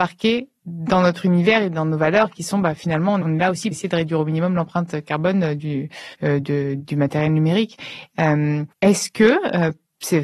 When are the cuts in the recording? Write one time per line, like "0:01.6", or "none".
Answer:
0:03.2
0:03.7
0:06.1
0:08.7